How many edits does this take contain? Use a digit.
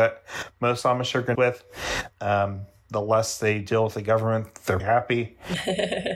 2